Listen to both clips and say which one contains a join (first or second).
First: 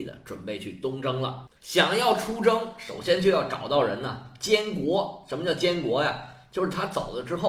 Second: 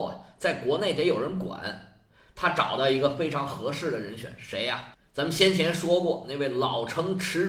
first